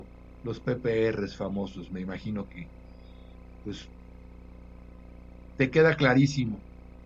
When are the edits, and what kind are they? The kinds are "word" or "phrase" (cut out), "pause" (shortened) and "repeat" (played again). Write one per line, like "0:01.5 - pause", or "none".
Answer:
none

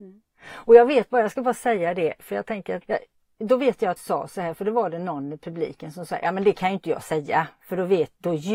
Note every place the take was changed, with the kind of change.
0:02.8 - word
0:04.0 - word

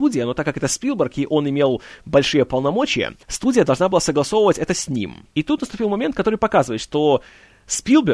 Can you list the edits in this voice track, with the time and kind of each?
0:03.2 - pause
0:05.3 - pause

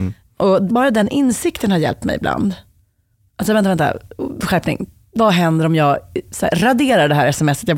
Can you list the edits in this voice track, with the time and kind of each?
none

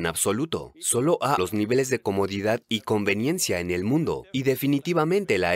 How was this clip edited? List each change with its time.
0:01.4 - word

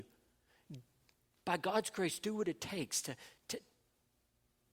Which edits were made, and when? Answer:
none

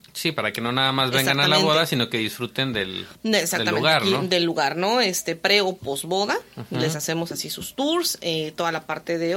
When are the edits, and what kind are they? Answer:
0:03.1 - pause

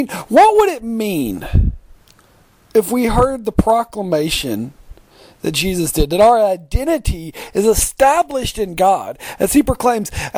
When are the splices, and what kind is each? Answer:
none

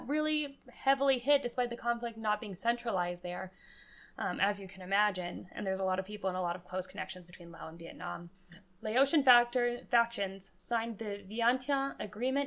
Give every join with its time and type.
0:08.3 - pause

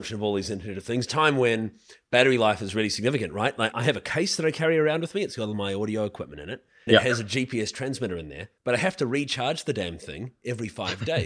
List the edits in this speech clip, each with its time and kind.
0:01.1 - phrase
0:06.9 - word
0:08.6 - pause

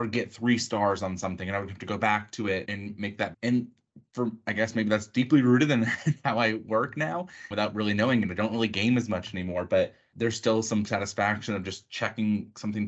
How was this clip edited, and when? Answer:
0:02.7 - word
0:03.3 - word
0:07.5 - word
0:10.1 - word

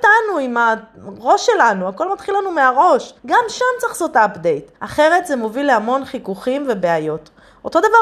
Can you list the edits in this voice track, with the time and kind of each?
0:03.2 - pause
0:04.8 - pause

